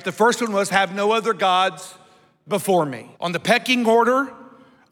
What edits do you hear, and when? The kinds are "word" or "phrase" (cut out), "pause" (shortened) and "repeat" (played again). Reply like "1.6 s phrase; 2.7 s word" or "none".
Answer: 3.2 s pause